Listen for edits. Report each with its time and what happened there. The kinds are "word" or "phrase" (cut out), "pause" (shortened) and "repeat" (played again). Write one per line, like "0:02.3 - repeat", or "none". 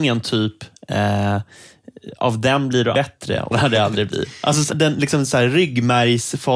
0:02.9 - word
0:03.5 - word
0:04.7 - word